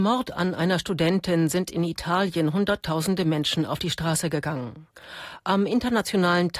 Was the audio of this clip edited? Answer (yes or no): no